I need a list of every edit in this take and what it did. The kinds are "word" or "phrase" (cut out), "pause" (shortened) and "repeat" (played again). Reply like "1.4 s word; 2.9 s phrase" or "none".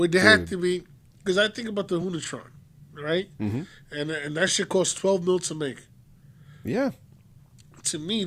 none

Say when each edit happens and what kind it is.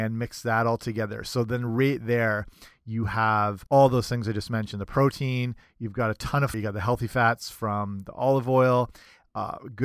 3.7 s pause; 6.5 s word

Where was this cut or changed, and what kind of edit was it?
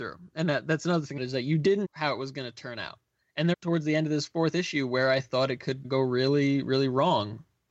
1.2 s phrase; 1.8 s word; 3.5 s phrase; 5.8 s word

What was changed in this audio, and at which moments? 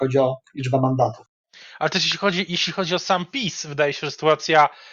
none

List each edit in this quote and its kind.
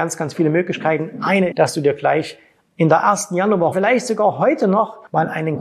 1.5 s word; 3.7 s word

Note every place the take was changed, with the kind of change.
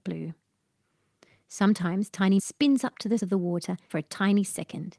2.4 s word; 3.2 s word; 3.9 s phrase

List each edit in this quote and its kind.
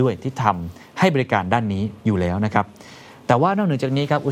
none

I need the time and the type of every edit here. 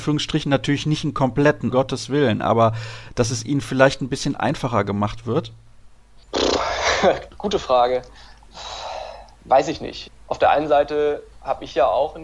1.7 s word; 6.3 s pause; 9.3 s pause; 11.3 s pause

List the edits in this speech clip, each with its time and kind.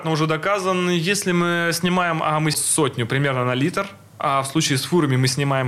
2.5 s phrase

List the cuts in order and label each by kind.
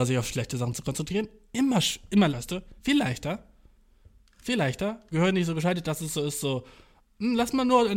2.3 s phrase; 2.8 s pause; 5.1 s phrase

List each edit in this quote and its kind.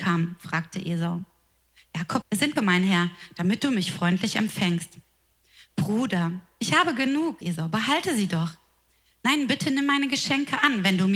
2.2 s word; 2.6 s word; 7.4 s word

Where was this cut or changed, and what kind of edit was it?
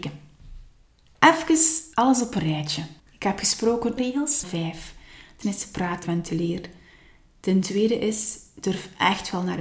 3.0 s pause; 4.0 s phrase; 4.4 s phrase; 5.4 s word; 6.0 s word

